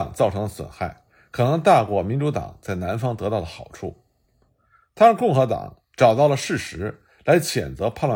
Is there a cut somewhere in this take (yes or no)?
no